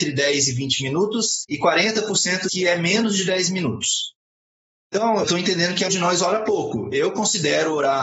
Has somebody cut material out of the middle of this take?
yes; 3 cuts; at 2.5 s, 5.2 s, 5.9 s

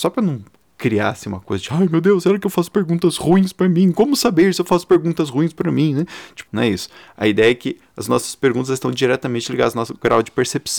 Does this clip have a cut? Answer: yes; 1 cut; at 6.5 s

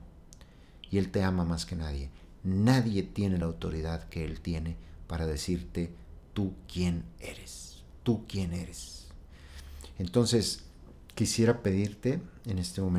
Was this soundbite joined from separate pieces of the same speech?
no; 0 cuts

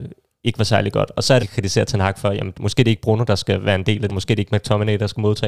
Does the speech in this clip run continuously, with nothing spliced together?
no; 2 cuts; at 1.4 s, 4.1 s

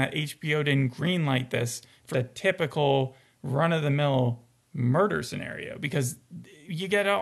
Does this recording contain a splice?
yes; 1 cut; at 2.1 s

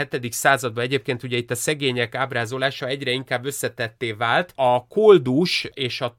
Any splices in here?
no; 0 cuts

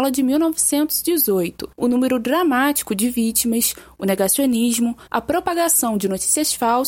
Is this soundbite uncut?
no; 2 cuts; at 1.7 s, 5.1 s

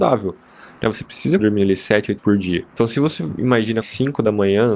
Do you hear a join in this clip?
yes; 4 cuts; at 1.4 s, 2.2 s, 2.7 s, 3.8 s

